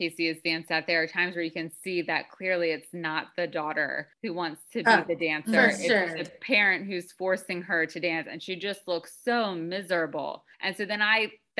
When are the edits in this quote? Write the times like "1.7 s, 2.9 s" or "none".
4.1 s, 10.5 s